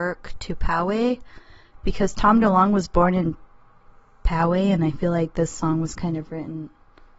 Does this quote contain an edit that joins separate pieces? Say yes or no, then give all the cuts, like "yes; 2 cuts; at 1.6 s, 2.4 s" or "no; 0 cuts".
no; 0 cuts